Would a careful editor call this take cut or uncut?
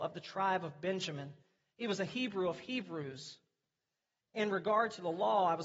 uncut